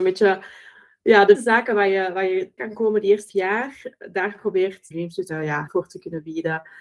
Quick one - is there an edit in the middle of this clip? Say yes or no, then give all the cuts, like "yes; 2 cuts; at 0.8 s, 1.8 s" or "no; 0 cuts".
yes; 6 cuts; at 1.3 s, 2.6 s, 3.3 s, 4.9 s, 5.3 s, 5.7 s